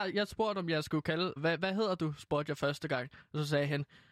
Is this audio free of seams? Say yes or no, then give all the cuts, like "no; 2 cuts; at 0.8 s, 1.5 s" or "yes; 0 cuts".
no; 1 cut; at 1.4 s